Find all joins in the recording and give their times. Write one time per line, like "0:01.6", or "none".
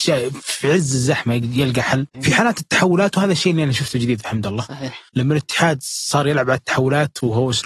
0:02.1
0:05.1